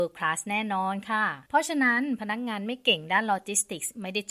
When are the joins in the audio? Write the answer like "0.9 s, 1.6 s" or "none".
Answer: 1.5 s